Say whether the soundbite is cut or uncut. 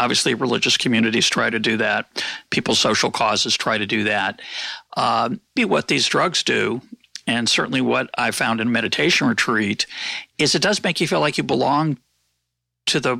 cut